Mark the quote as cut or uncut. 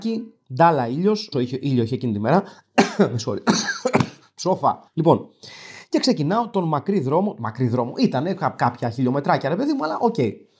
cut